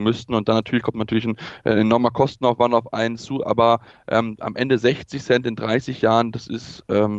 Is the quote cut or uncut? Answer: uncut